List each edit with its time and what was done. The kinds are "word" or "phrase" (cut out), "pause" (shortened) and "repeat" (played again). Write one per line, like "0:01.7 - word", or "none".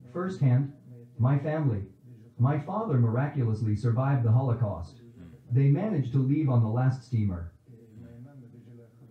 none